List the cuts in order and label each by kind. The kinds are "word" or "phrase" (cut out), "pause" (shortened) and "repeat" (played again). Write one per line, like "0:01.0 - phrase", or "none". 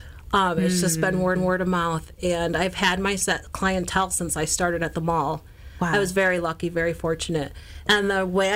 0:01.4 - repeat

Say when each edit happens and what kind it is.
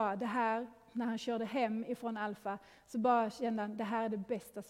none

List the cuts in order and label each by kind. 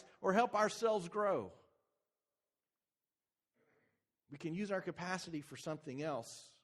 none

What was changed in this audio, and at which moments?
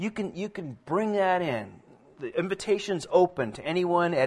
none

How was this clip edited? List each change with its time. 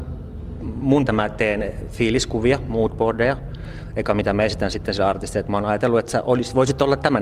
0:01.1 - phrase

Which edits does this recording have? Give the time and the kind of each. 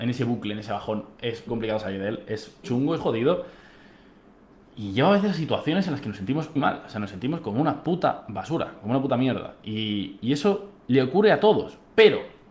0:01.5 - word
0:02.6 - word
0:03.0 - word
0:06.6 - word
0:10.8 - pause

